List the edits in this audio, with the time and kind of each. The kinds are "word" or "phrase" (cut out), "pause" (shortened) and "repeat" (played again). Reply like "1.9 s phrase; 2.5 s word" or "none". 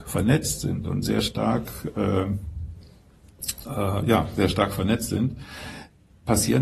none